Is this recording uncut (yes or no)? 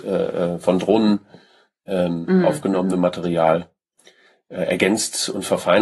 yes